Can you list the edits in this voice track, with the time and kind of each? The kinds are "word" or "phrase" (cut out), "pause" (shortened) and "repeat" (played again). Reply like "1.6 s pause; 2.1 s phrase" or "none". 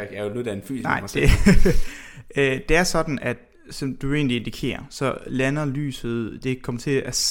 none

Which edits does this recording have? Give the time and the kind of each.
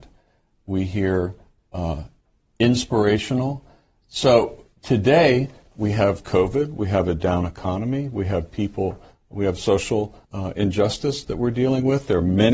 10.2 s pause

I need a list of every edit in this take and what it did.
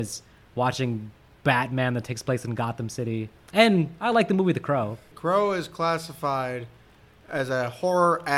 none

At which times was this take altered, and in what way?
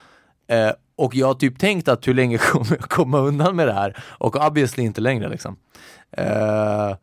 none

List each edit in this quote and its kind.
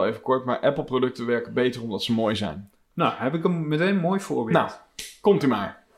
none

